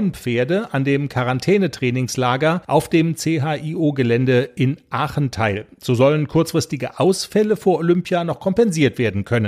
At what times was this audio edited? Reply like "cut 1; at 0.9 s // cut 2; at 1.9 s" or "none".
none